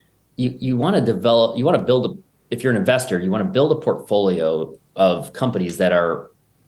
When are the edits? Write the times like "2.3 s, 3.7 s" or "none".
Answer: none